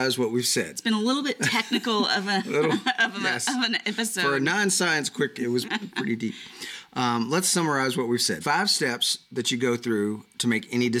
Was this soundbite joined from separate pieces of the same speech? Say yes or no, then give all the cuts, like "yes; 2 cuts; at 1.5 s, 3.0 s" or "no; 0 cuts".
yes; 3 cuts; at 5.3 s, 5.6 s, 8.4 s